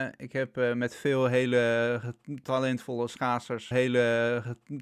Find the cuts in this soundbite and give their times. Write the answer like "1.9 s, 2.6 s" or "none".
3.7 s